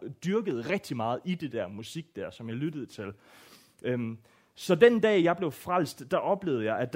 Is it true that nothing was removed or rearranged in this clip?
yes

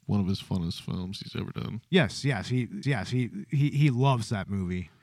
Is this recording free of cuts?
no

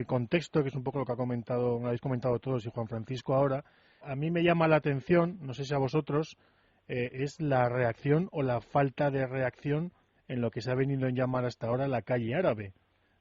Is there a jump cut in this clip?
yes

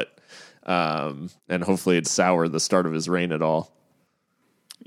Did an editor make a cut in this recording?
yes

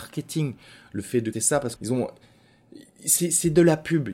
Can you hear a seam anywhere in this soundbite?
yes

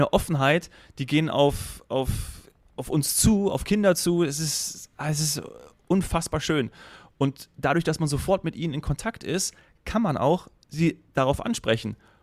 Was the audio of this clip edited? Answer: no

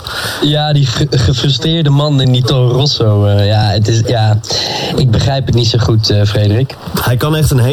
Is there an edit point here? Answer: no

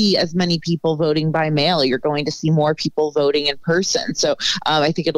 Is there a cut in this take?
no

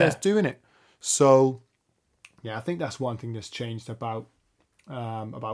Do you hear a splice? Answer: no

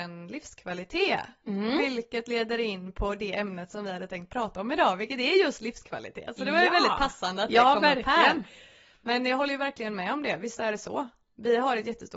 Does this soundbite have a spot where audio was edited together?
no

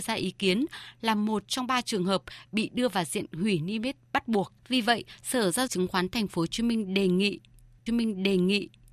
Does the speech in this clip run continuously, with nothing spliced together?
no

